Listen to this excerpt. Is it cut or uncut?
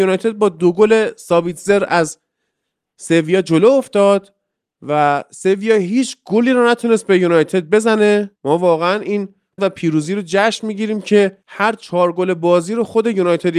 cut